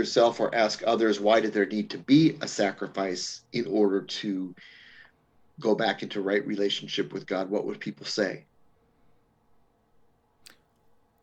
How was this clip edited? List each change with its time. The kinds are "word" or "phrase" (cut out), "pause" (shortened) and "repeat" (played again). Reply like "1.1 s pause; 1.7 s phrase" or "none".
none